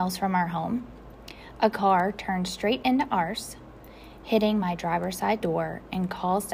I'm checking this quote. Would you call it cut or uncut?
uncut